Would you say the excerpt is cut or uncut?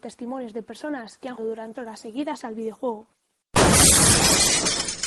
cut